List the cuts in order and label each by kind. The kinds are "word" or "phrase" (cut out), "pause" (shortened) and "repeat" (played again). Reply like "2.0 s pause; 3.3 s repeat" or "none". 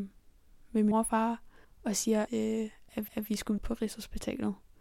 0.9 s word; 1.6 s pause; 2.3 s word; 3.1 s repeat; 3.6 s word